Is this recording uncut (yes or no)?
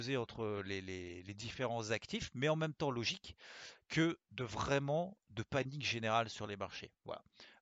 yes